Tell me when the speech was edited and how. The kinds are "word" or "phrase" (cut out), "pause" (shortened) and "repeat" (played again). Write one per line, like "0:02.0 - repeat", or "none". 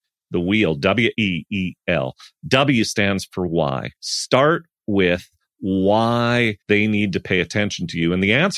0:01.1 - word
0:04.0 - pause
0:06.6 - pause